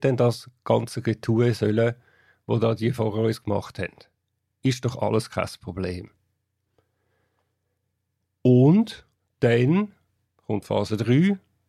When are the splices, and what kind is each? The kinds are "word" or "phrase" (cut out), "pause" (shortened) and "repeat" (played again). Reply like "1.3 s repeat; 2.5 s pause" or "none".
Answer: none